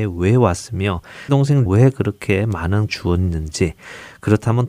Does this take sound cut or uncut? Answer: cut